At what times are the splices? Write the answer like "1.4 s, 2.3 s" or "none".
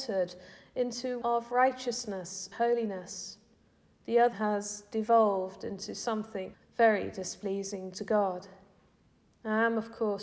1.2 s, 2.5 s, 4.3 s, 6.5 s